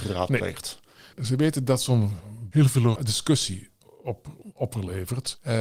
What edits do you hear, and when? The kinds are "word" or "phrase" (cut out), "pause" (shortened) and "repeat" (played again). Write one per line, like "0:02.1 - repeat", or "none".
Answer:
0:02.5 - word
0:03.0 - word